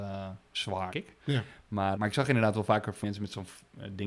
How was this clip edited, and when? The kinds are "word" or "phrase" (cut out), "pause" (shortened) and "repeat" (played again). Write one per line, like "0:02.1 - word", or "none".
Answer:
0:00.9 - word
0:02.0 - word
0:03.0 - word